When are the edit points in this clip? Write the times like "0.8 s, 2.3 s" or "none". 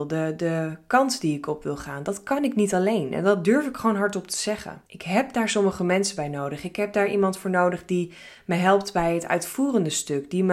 4.9 s